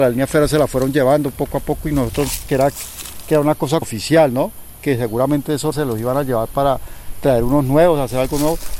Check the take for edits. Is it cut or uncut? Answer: cut